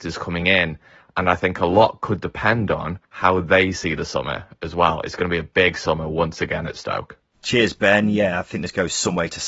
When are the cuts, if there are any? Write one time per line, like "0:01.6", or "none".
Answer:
0:03.0
0:07.3

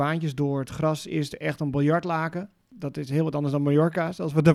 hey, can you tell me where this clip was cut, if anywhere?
none

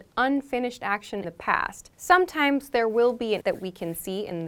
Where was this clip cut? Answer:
0:01.2
0:01.9
0:03.4

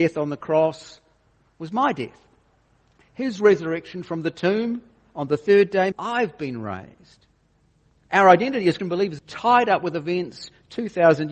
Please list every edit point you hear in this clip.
0:05.9
0:08.8
0:09.2

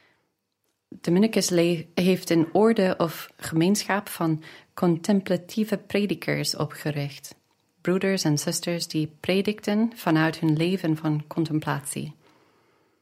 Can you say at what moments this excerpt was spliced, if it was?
none

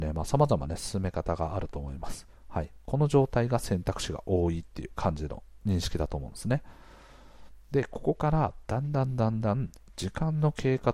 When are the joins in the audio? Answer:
0:02.4

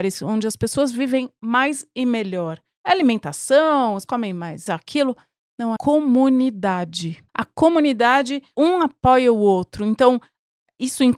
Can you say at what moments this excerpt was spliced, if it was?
0:04.1
0:04.7
0:05.8
0:07.3
0:08.5

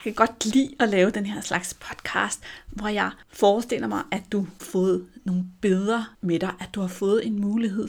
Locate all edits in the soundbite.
0:04.6
0:06.1

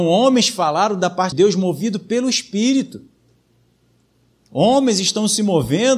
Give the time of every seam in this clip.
0:01.3

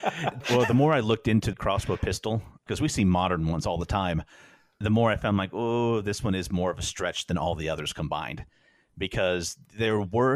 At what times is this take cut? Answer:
0:01.5

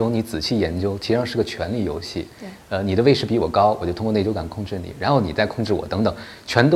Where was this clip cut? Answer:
0:02.3

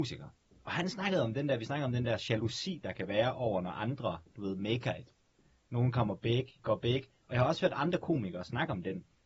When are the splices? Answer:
0:06.6

